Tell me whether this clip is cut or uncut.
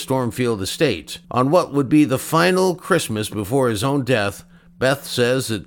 cut